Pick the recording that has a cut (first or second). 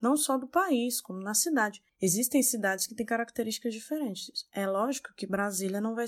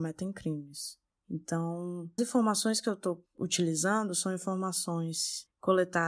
second